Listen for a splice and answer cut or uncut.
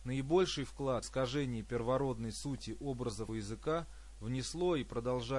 cut